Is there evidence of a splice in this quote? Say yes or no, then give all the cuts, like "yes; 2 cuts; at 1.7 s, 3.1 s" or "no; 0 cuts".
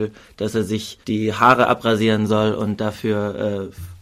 yes; 1 cut; at 1.0 s